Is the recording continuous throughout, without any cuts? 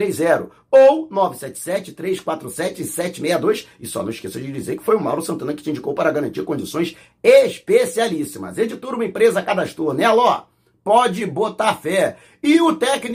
yes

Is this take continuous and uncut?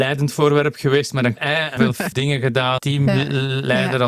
no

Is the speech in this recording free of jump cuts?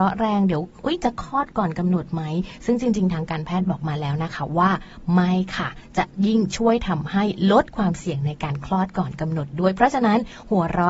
yes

